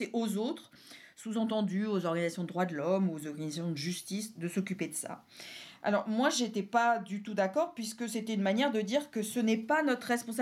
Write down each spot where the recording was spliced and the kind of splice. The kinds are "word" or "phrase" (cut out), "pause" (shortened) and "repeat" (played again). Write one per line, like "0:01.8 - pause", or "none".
none